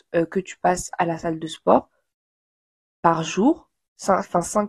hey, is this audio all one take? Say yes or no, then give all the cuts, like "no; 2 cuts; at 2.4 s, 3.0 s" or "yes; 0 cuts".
yes; 0 cuts